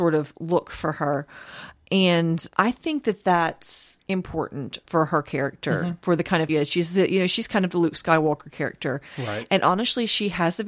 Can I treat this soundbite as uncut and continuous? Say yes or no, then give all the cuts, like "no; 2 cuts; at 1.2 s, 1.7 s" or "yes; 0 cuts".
no; 2 cuts; at 4.8 s, 6.5 s